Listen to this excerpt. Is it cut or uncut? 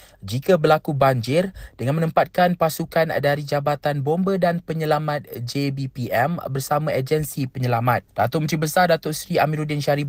cut